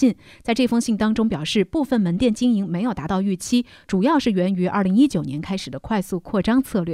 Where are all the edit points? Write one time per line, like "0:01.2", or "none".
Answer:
none

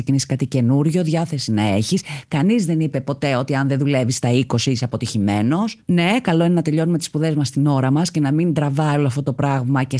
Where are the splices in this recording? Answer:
0:05.8

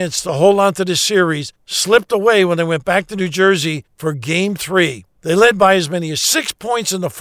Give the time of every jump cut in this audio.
0:05.1

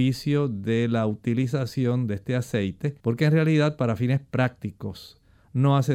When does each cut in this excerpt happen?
0:03.0

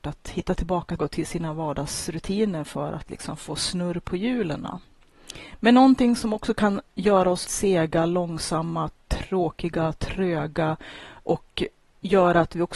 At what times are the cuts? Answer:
0:01.0
0:07.4

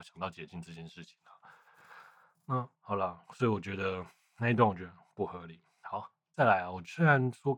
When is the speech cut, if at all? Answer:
0:02.7
0:03.2

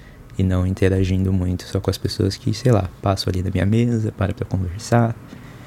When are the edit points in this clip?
none

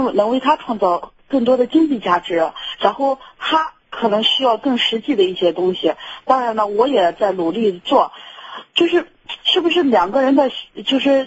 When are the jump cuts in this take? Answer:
0:03.8
0:08.7
0:09.4

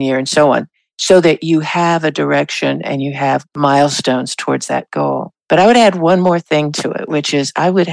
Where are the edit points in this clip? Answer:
none

